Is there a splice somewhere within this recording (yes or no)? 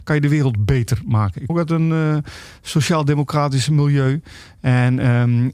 yes